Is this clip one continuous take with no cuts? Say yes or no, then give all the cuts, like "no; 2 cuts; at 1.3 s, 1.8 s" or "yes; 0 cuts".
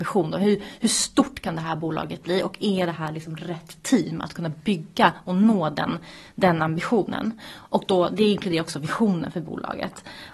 yes; 0 cuts